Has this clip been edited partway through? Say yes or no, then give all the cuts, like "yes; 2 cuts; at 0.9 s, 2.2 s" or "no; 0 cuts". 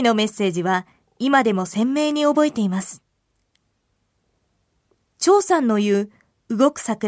no; 0 cuts